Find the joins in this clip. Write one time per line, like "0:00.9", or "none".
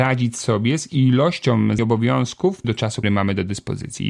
0:01.8
0:02.6
0:03.0